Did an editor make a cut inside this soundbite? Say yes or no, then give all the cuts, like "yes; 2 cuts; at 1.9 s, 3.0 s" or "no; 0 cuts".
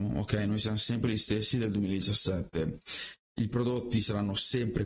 no; 0 cuts